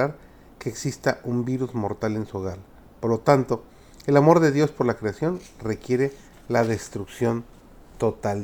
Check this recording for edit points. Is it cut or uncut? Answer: uncut